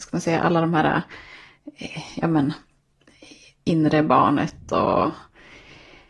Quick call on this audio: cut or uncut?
uncut